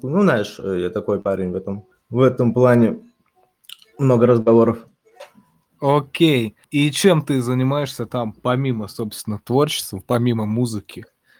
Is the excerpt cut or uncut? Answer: cut